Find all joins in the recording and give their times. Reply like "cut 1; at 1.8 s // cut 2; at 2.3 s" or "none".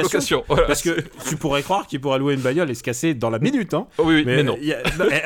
none

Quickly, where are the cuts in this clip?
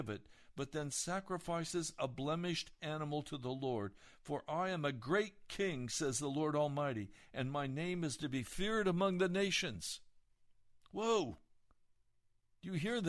none

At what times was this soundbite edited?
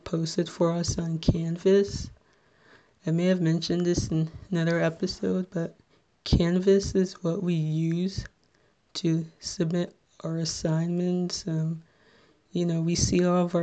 none

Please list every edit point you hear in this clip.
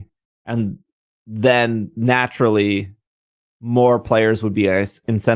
none

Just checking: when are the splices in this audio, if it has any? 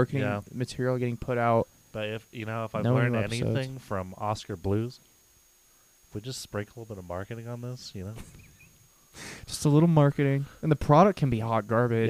none

